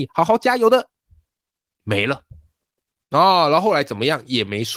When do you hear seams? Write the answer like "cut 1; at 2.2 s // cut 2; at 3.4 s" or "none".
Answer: none

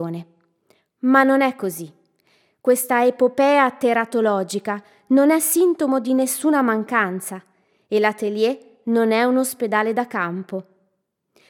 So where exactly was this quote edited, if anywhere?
none

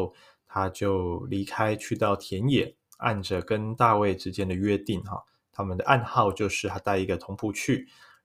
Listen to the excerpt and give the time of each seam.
none

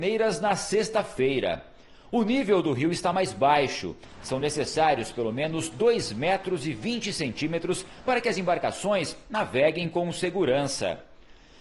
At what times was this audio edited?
none

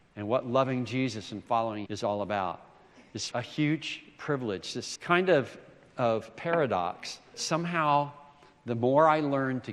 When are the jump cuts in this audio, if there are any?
cut 1; at 1.9 s // cut 2; at 3.3 s // cut 3; at 5.0 s // cut 4; at 7.3 s

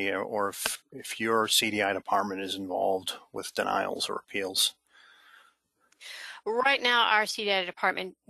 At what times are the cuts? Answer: none

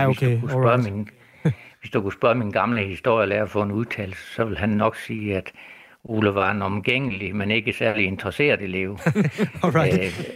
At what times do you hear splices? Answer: none

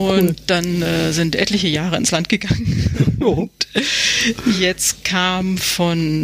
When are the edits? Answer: none

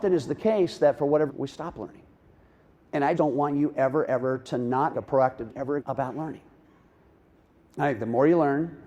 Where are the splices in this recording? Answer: cut 1; at 1.3 s // cut 2; at 3.2 s // cut 3; at 4.1 s // cut 4; at 4.9 s // cut 5; at 5.5 s // cut 6; at 5.8 s

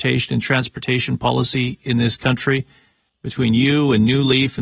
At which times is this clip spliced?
none

